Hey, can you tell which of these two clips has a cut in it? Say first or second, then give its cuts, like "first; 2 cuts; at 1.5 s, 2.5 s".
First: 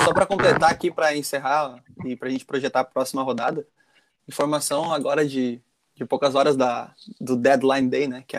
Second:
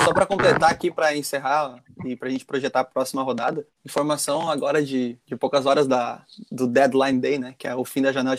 second; 2 cuts; at 3.7 s, 5.2 s